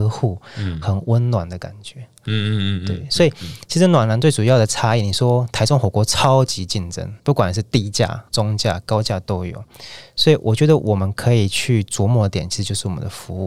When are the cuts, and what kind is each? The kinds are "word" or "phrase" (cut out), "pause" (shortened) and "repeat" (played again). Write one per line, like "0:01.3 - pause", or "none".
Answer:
0:07.2 - pause
0:08.3 - pause